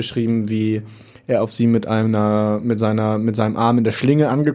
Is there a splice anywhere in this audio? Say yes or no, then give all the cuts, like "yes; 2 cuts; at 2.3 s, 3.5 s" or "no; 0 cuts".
no; 0 cuts